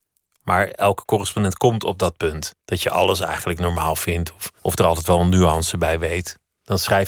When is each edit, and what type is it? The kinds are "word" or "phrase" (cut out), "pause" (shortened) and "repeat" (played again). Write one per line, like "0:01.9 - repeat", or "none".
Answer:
0:02.6 - pause
0:04.6 - pause